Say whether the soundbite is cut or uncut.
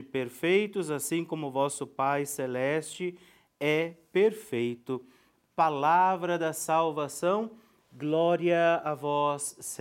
uncut